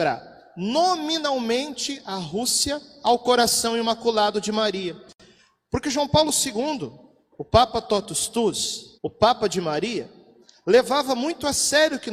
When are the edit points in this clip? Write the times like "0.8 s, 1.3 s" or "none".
8.9 s